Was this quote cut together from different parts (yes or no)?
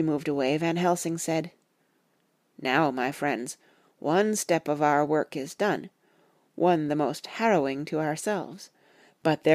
no